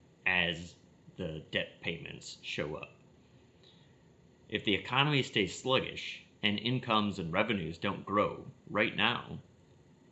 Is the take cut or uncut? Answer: uncut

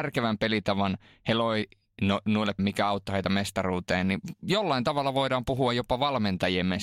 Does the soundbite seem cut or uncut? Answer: cut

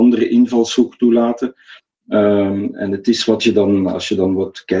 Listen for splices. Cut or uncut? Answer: uncut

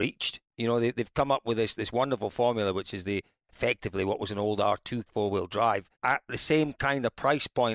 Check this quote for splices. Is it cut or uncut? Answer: cut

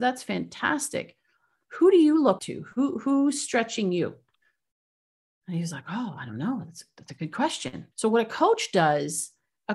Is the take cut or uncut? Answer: cut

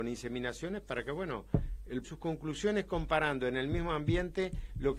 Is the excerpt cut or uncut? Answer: cut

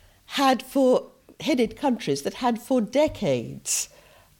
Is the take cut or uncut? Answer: uncut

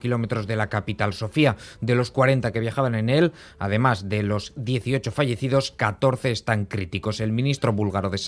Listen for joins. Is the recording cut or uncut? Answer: uncut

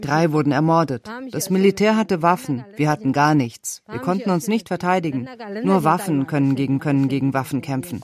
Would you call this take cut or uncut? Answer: cut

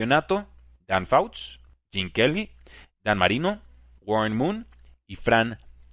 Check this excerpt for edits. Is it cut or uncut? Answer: uncut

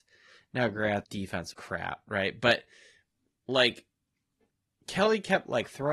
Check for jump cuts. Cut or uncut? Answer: cut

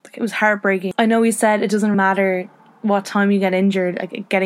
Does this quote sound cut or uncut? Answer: cut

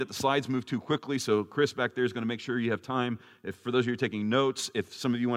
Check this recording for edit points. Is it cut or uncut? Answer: uncut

